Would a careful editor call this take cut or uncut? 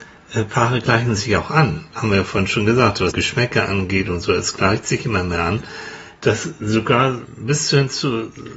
cut